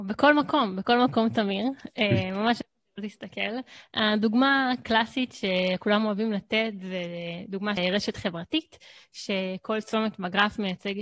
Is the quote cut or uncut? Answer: cut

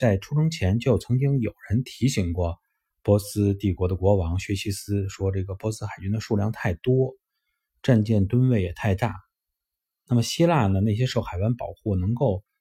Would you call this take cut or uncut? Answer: uncut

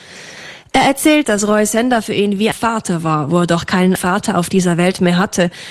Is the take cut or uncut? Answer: cut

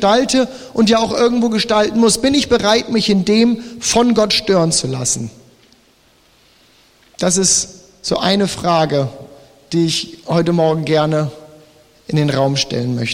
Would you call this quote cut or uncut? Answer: uncut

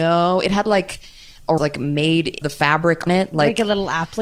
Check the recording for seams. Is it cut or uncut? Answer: cut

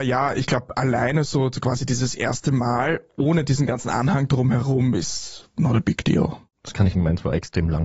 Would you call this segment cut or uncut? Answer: cut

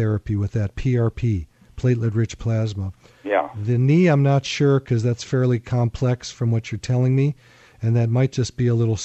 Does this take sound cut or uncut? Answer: uncut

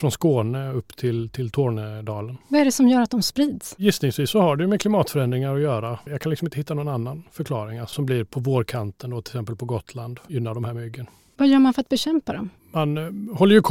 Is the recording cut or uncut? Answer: cut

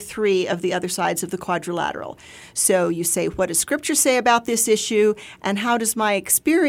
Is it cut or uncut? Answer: uncut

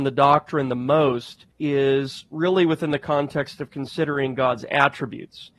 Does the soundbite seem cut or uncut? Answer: cut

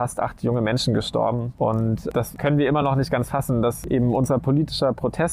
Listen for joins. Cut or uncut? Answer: uncut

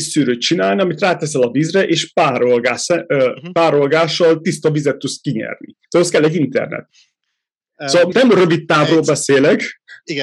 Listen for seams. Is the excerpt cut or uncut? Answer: cut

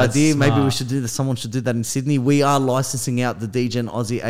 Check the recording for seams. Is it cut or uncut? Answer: uncut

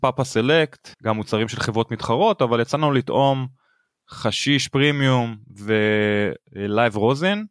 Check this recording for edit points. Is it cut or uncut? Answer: cut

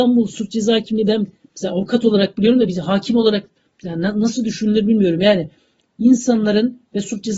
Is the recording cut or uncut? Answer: uncut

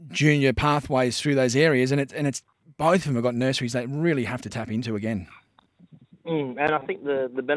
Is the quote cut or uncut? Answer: uncut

